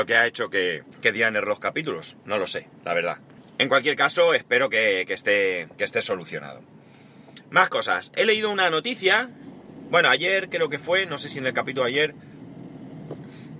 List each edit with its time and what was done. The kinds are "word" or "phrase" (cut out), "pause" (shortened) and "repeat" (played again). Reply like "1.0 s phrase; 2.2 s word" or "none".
0.9 s pause; 3.4 s pause; 5.7 s pause